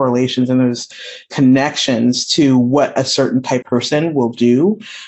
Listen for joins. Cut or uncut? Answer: cut